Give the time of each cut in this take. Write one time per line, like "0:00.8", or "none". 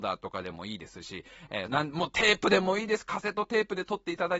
0:01.7